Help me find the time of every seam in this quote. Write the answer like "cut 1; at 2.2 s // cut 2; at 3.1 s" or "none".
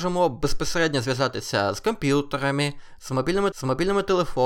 cut 1; at 3.5 s

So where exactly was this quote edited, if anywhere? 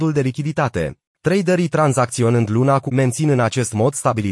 cut 1; at 1.1 s // cut 2; at 2.9 s

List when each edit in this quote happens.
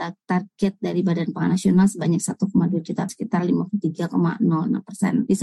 cut 1; at 3.1 s

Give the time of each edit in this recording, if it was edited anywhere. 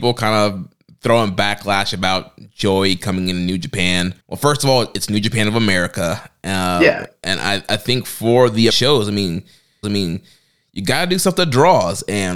cut 1; at 4.2 s // cut 2; at 8.7 s // cut 3; at 9.8 s

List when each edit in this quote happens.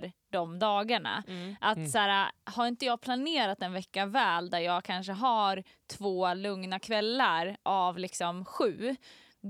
none

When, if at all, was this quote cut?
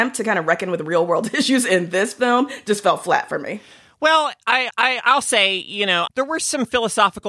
cut 1; at 4.7 s // cut 2; at 6.1 s

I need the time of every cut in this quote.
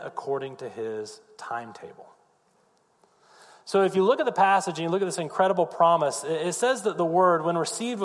none

